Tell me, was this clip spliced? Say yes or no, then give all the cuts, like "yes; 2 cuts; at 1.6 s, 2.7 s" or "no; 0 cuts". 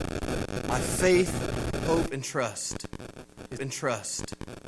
yes; 1 cut; at 3.6 s